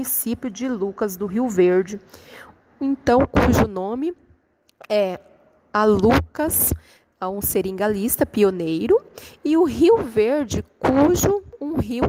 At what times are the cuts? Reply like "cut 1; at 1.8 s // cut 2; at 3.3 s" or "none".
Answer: none

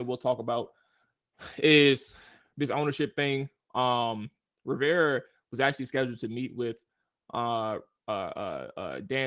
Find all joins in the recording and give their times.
none

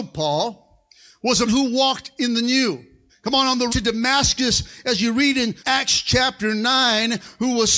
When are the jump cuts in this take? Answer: cut 1; at 1.4 s // cut 2; at 3.1 s // cut 3; at 3.7 s // cut 4; at 5.6 s

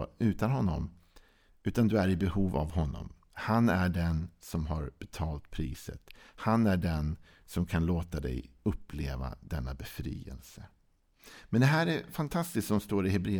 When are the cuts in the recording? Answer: none

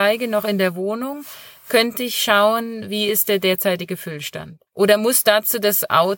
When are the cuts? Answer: cut 1; at 4.7 s

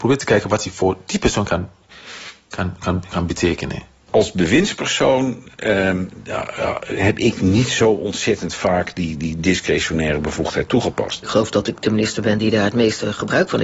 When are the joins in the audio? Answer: none

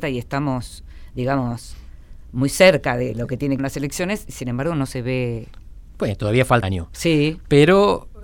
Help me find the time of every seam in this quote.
cut 1; at 3.6 s // cut 2; at 6.6 s

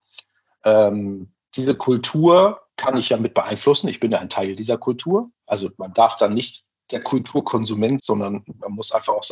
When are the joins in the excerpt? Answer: cut 1; at 2.7 s // cut 2; at 5.3 s // cut 3; at 8.0 s

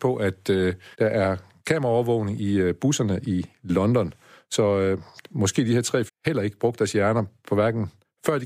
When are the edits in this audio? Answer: cut 1; at 0.9 s // cut 2; at 6.1 s

